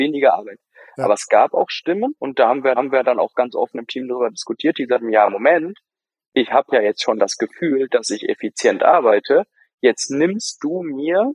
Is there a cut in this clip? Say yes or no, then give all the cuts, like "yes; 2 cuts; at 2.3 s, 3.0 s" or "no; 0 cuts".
yes; 2 cuts; at 2.2 s, 2.8 s